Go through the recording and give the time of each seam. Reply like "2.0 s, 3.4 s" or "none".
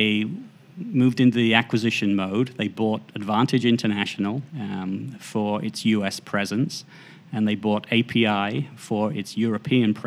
4.5 s